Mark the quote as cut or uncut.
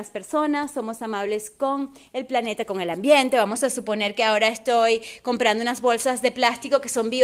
uncut